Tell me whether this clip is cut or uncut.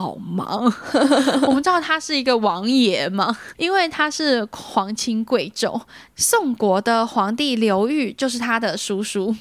cut